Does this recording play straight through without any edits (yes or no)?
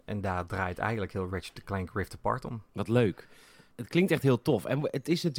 yes